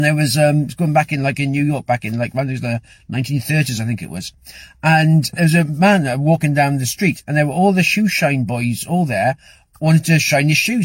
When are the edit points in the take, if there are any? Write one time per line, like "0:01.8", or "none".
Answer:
none